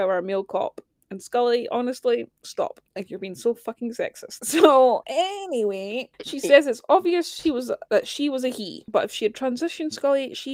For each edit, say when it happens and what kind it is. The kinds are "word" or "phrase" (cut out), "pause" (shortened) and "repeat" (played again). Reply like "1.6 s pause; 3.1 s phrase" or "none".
2.9 s pause